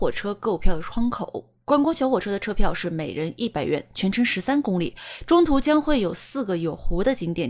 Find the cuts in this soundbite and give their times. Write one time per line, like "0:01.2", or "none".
none

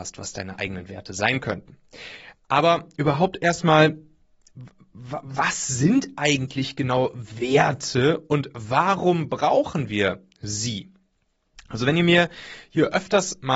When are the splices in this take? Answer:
none

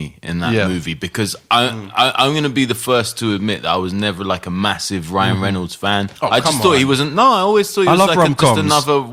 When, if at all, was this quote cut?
0:06.2

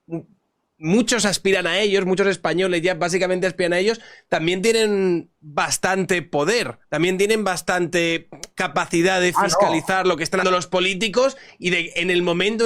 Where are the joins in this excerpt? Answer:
0:06.8
0:10.4

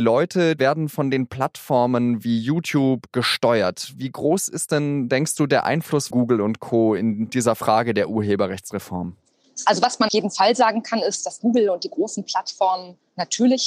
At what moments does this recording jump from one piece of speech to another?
0:06.1
0:10.1

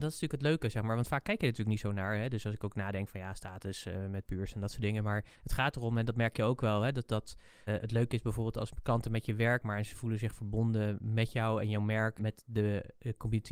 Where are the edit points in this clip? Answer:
0:05.3
0:07.7
0:12.2

